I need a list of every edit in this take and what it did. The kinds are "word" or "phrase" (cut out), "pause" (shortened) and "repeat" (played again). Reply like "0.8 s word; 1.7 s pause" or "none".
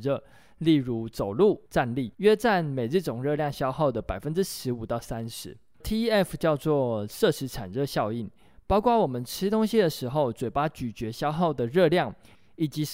1.7 s pause; 2.1 s pause; 5.8 s word